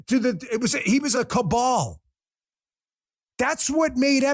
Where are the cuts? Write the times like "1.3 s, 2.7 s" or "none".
1.1 s